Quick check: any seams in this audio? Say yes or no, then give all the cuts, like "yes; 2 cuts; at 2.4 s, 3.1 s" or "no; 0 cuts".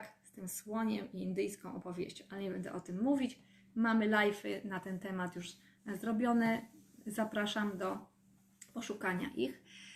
no; 0 cuts